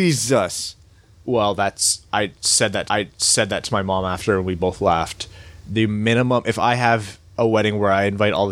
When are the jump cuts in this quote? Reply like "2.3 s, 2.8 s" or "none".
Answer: 2.9 s, 7.3 s